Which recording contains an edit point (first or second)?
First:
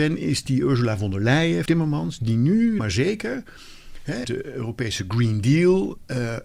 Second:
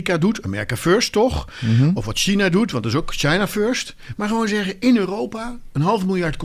first